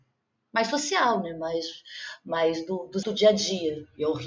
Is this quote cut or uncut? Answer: cut